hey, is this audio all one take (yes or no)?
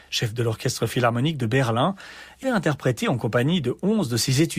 no